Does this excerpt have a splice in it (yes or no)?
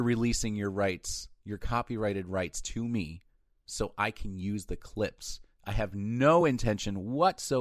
no